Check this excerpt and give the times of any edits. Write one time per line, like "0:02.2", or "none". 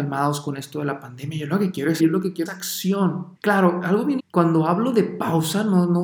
0:02.0
0:02.5
0:03.4
0:04.2